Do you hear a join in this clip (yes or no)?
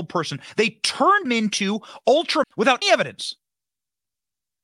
yes